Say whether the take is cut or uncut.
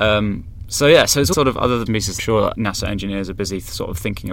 cut